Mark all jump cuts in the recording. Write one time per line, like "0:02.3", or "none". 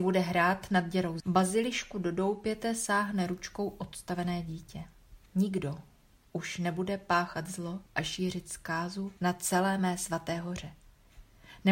0:01.2
0:05.3
0:07.9
0:09.2